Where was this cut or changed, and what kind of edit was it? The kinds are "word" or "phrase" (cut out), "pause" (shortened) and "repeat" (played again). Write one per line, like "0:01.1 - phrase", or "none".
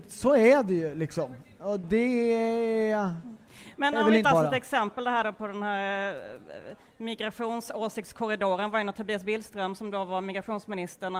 0:01.8 - word
0:04.2 - phrase